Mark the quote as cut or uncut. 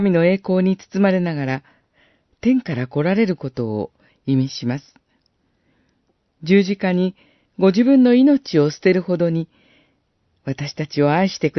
uncut